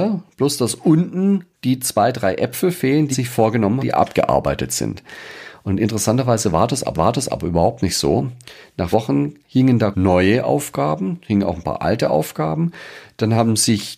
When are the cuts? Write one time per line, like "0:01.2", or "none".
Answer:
0:01.5
0:03.1
0:03.8
0:06.9
0:08.9
0:09.4
0:09.9